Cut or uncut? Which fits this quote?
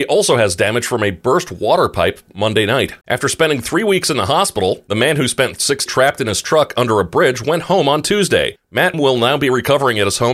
cut